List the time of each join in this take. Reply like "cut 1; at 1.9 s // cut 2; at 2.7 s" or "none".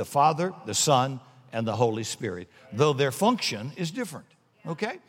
none